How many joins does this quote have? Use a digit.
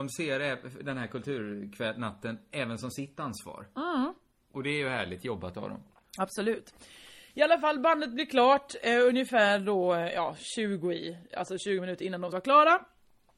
1